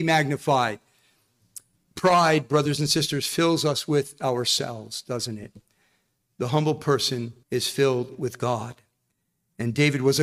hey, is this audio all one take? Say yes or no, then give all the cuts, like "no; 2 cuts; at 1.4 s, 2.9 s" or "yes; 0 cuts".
no; 2 cuts; at 1.8 s, 7.4 s